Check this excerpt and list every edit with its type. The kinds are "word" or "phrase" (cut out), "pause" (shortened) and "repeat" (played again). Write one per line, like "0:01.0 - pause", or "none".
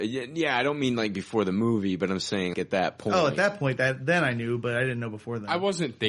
0:02.5 - word